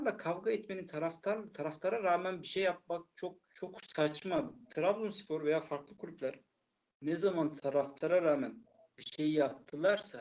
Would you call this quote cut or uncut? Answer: cut